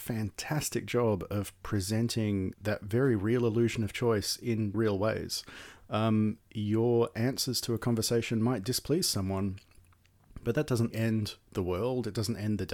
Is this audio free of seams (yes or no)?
no